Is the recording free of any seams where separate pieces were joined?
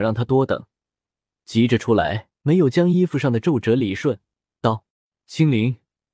no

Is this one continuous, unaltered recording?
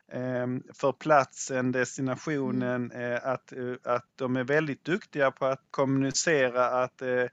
no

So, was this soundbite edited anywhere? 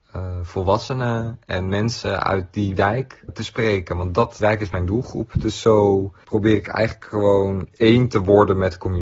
yes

